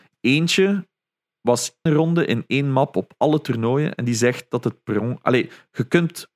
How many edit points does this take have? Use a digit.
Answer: 1